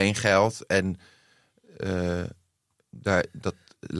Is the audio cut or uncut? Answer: uncut